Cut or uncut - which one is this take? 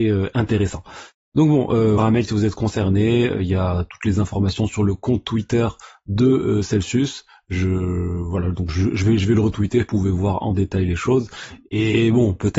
cut